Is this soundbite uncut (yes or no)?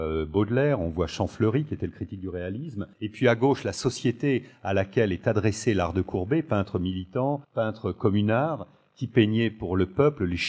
no